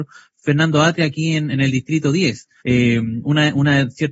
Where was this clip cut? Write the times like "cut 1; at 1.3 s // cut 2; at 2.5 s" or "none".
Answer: cut 1; at 2.6 s